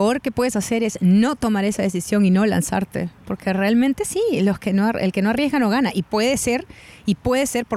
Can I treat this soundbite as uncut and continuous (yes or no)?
yes